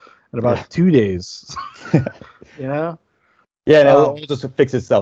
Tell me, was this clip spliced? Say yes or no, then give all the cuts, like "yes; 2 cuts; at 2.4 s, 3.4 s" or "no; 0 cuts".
no; 0 cuts